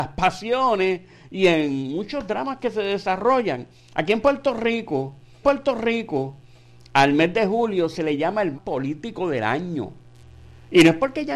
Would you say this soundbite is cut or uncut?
cut